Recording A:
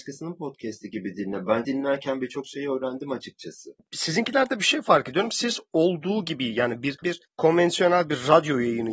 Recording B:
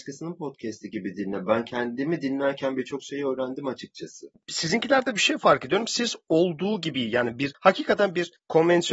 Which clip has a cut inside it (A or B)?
A